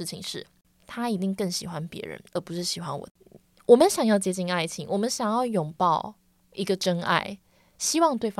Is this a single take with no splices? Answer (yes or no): yes